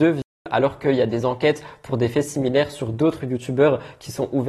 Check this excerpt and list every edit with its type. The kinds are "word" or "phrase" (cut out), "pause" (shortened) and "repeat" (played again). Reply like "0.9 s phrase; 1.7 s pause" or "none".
none